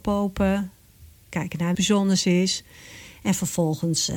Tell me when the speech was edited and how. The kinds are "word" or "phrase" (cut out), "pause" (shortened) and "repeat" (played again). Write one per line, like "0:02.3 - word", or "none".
0:01.7 - phrase